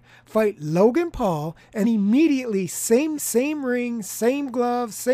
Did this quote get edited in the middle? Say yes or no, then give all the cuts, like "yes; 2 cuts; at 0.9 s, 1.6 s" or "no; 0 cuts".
yes; 2 cuts; at 1.8 s, 3.1 s